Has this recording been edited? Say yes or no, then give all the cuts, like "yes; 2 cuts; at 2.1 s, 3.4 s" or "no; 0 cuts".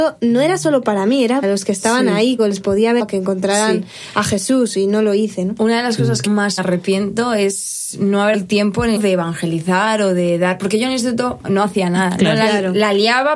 yes; 8 cuts; at 1.4 s, 2.4 s, 3.0 s, 6.3 s, 6.6 s, 8.3 s, 9.0 s, 11.4 s